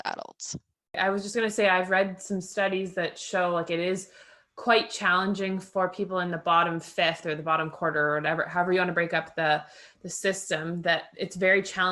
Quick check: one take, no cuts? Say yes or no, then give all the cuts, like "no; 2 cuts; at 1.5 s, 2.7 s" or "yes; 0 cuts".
yes; 0 cuts